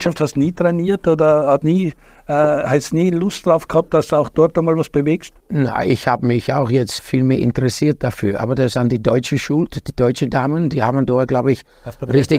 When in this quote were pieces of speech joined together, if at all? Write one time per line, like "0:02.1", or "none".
0:01.6
0:05.4
0:07.0